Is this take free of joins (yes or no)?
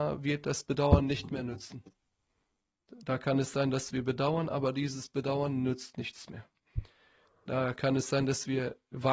yes